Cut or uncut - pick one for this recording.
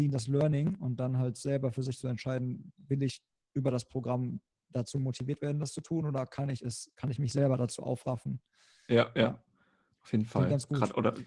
uncut